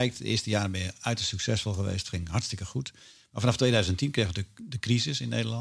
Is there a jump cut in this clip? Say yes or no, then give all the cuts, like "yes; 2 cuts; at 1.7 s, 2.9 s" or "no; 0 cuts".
no; 0 cuts